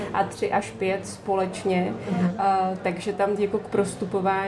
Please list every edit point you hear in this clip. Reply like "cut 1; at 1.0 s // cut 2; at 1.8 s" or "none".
cut 1; at 3.4 s